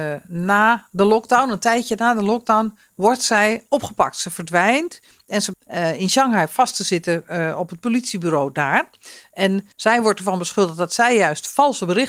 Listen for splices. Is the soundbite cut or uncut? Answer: cut